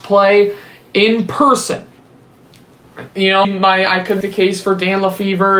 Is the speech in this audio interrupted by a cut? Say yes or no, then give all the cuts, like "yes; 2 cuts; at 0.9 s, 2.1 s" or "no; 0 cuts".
yes; 2 cuts; at 3.4 s, 4.2 s